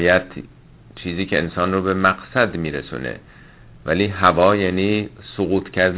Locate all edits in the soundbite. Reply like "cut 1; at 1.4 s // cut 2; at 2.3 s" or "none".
none